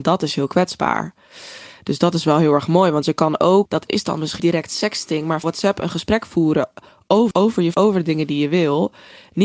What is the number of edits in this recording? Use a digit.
5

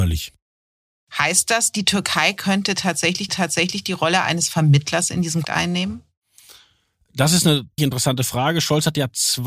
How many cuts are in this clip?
3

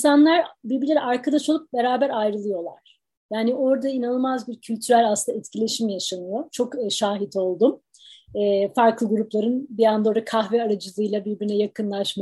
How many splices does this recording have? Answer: 0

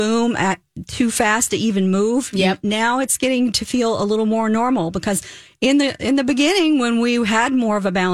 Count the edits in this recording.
0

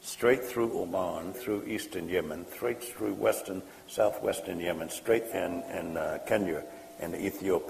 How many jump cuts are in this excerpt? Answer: 2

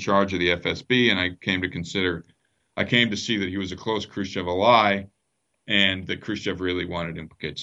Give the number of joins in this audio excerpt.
0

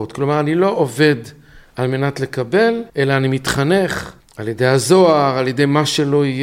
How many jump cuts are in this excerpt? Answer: 2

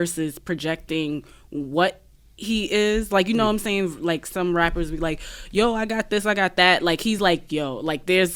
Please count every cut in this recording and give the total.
0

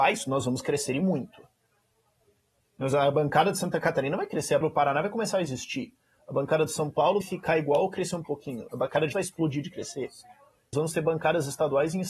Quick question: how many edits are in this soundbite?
4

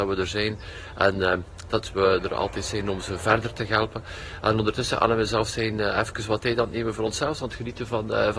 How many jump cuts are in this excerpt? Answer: 0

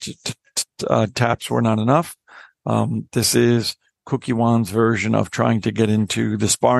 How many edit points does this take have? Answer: 0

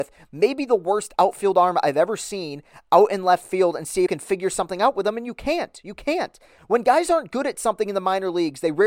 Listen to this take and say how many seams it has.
1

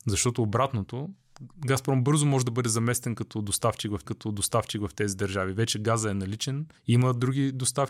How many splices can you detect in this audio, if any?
2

